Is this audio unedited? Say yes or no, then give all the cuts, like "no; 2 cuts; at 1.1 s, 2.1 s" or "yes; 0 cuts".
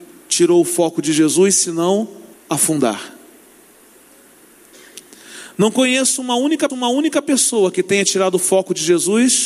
no; 2 cuts; at 2.3 s, 6.7 s